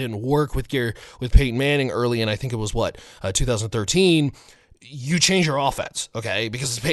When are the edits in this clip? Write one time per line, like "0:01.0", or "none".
none

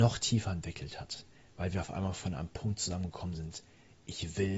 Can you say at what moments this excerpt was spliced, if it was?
none

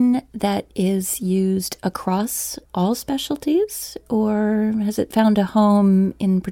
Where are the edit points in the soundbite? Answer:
0:02.7

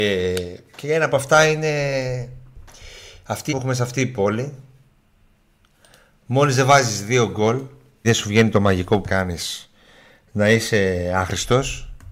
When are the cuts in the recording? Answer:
0:03.5
0:08.0
0:09.0

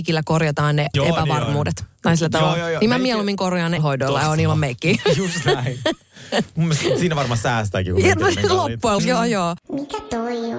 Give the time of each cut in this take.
0:00.9
0:03.8
0:09.0

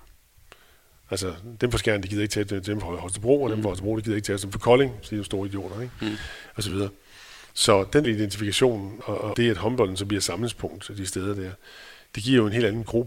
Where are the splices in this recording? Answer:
0:08.0
0:09.0
0:09.3

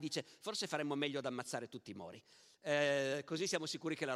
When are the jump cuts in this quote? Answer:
none

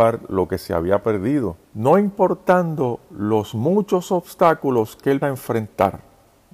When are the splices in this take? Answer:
0:01.6
0:05.2

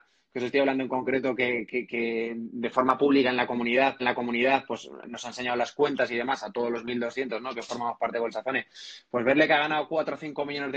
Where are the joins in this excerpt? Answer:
0:04.0

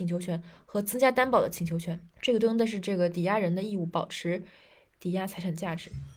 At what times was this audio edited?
0:02.1

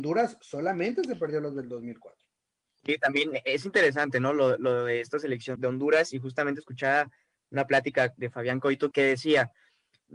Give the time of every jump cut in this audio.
0:05.6
0:08.2
0:08.9

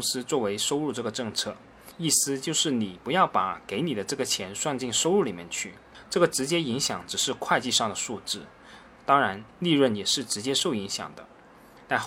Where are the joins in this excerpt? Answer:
0:09.5

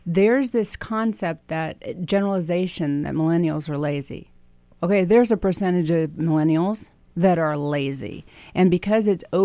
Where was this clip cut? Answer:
none

